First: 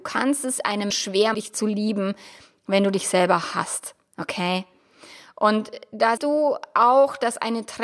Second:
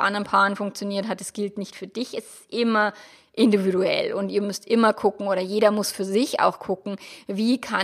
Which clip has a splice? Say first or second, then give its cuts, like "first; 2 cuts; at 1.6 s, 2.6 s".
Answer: first; 3 cuts; at 0.9 s, 1.3 s, 6.2 s